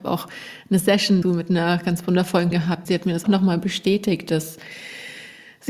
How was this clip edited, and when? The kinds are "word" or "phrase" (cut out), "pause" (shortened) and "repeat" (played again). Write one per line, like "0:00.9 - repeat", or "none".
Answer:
0:01.2 - word
0:02.5 - word
0:02.9 - word
0:03.2 - word